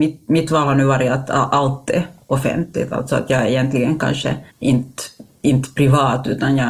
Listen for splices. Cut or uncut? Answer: cut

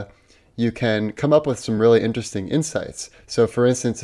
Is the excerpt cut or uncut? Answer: uncut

